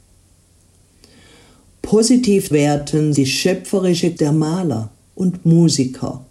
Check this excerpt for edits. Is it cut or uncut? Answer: cut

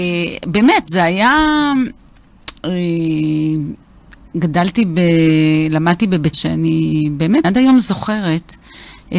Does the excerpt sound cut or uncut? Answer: cut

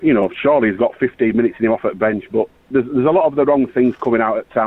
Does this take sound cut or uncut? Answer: cut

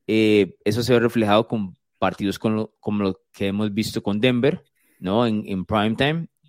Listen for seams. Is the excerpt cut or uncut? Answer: uncut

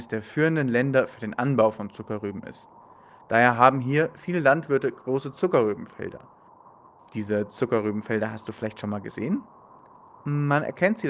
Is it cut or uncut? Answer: uncut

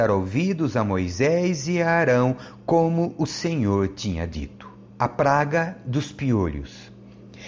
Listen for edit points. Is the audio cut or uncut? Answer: cut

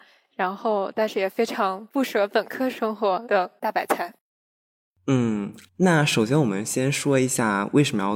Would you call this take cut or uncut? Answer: cut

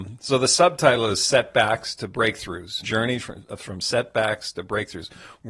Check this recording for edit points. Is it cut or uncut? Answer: cut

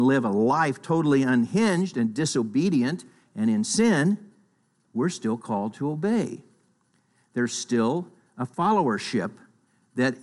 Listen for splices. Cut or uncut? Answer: uncut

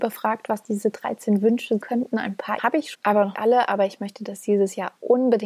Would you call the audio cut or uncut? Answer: cut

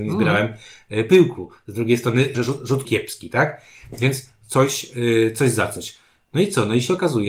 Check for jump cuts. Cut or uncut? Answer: cut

